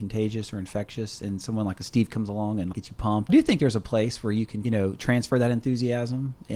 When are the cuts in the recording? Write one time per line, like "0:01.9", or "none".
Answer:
0:02.7
0:03.3
0:04.6